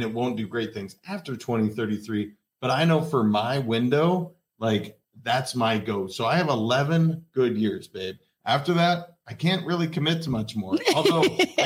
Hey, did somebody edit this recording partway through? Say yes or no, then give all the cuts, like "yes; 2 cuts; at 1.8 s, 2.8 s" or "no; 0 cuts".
no; 0 cuts